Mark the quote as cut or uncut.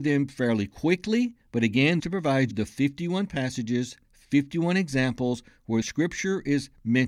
cut